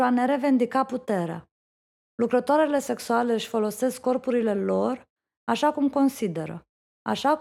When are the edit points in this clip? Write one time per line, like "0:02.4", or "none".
none